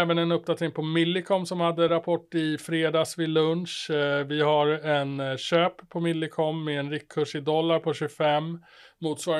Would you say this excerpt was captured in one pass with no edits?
yes; 0 cuts

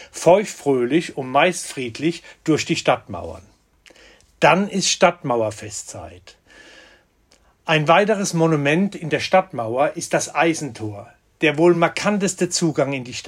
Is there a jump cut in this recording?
no; 0 cuts

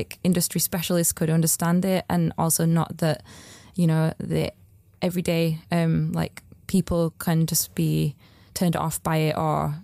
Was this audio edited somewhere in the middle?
no; 0 cuts

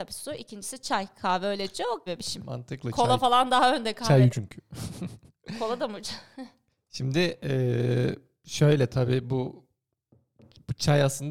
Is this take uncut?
no; 2 cuts; at 2.1 s, 4.3 s

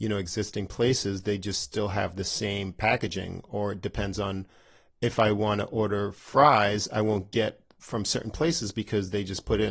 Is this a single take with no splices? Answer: yes; 0 cuts

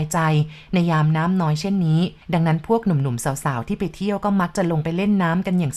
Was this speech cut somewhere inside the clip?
yes; 1 cut; at 2.2 s

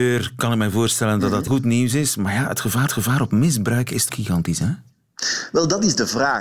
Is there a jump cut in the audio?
yes; 3 cuts; at 1.5 s, 2.9 s, 4.1 s

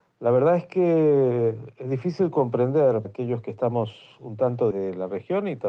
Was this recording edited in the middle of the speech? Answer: yes; 2 cuts; at 3.0 s, 4.7 s

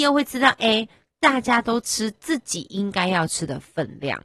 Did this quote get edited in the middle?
no; 0 cuts

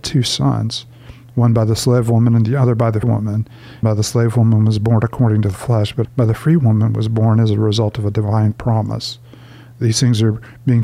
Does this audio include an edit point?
yes; 3 cuts; at 3.0 s, 3.8 s, 6.0 s

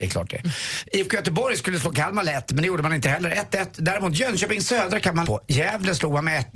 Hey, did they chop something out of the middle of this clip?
yes; 1 cut; at 5.2 s

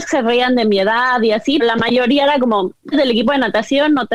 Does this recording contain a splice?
yes; 2 cuts; at 1.6 s, 2.9 s

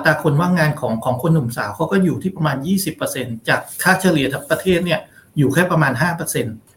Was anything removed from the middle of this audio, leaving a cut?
no; 0 cuts

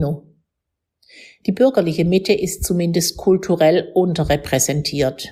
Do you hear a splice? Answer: no; 0 cuts

